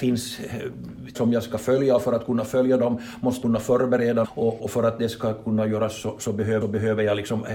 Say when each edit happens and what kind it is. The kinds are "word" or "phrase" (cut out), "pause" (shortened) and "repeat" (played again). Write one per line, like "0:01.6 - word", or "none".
0:01.1 - word
0:03.4 - word
0:04.2 - word
0:04.6 - word
0:06.6 - repeat